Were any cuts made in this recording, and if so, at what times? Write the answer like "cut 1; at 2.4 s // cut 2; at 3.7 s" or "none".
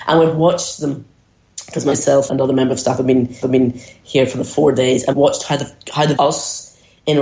cut 1; at 2.3 s // cut 2; at 3.4 s // cut 3; at 5.1 s // cut 4; at 6.2 s